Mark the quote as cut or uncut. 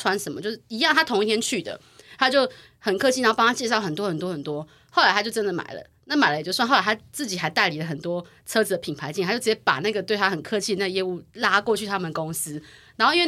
uncut